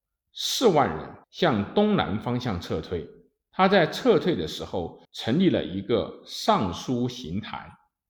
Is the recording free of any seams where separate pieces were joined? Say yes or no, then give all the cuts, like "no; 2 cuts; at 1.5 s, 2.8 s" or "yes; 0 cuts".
no; 2 cuts; at 1.2 s, 5.0 s